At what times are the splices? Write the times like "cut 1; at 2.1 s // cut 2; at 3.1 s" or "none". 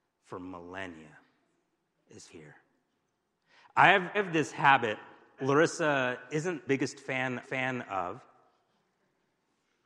cut 1; at 2.3 s // cut 2; at 4.1 s // cut 3; at 5.4 s // cut 4; at 6.7 s // cut 5; at 7.4 s